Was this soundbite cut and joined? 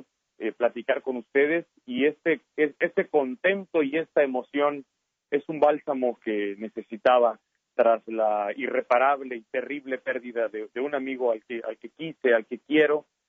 no; 0 cuts

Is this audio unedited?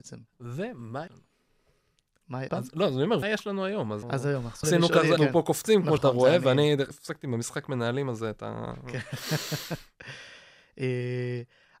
no; 8 cuts; at 1.1 s, 2.5 s, 3.2 s, 4.0 s, 4.6 s, 5.2 s, 6.0 s, 6.9 s

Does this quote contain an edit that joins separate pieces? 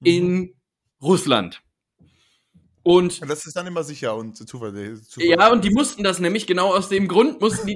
no; 0 cuts

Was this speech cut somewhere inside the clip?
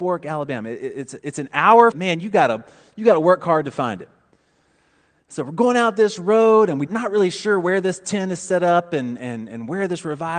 yes; 2 cuts; at 1.9 s, 6.9 s

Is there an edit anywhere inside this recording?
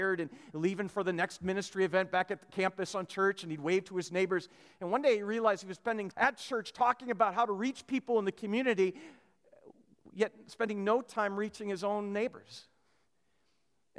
yes; 1 cut; at 6.1 s

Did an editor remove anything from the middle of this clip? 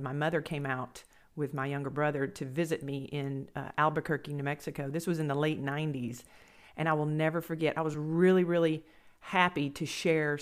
no; 0 cuts

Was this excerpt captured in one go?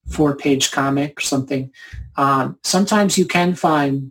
no; 1 cut; at 1.2 s

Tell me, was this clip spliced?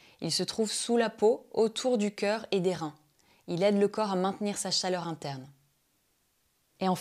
no; 0 cuts

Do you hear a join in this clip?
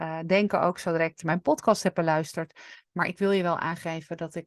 yes; 1 cut; at 1.2 s

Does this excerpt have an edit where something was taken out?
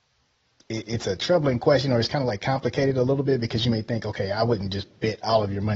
no; 0 cuts

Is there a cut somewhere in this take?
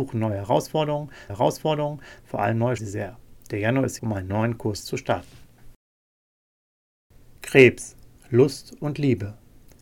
yes; 4 cuts; at 1.3 s, 2.8 s, 4.0 s, 7.4 s

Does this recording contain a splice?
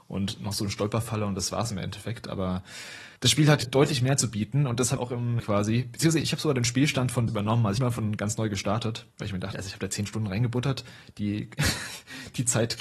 yes; 8 cuts; at 3.2 s, 3.6 s, 5.0 s, 5.4 s, 7.3 s, 7.8 s, 9.1 s, 9.5 s

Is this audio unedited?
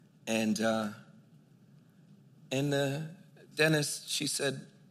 yes; 0 cuts

